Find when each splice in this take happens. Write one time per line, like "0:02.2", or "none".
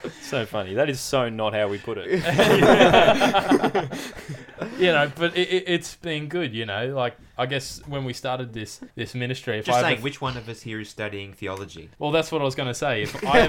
0:08.9
0:11.9